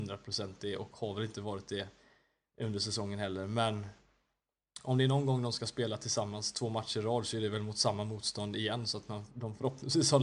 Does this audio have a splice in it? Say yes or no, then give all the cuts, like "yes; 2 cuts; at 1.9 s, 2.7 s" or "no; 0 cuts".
no; 0 cuts